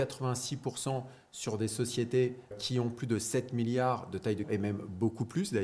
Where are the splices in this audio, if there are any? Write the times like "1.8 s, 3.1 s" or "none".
2.5 s, 4.4 s